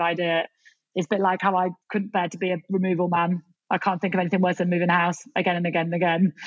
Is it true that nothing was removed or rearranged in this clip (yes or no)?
no